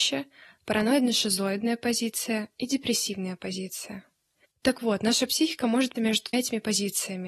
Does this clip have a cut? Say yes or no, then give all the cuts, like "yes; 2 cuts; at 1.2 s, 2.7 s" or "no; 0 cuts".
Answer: yes; 3 cuts; at 4.4 s, 6.0 s, 6.3 s